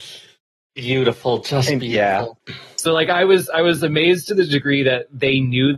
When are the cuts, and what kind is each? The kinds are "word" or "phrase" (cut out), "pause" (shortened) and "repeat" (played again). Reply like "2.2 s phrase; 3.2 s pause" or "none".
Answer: 2.4 s pause

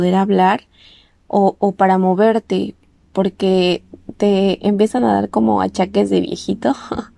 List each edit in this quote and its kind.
none

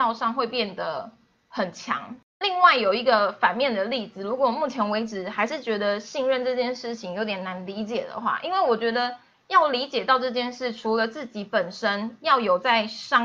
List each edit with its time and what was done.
none

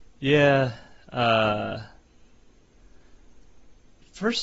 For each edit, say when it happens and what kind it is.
none

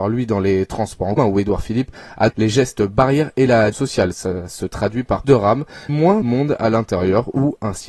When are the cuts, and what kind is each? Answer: 1.2 s word; 2.3 s word; 3.7 s word; 4.5 s word; 5.2 s word; 5.9 s word; 6.2 s word

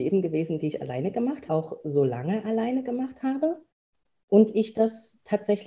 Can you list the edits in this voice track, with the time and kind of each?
1.5 s phrase

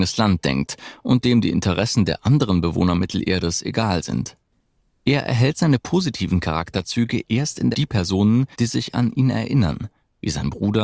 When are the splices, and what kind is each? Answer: 7.7 s phrase; 8.5 s pause

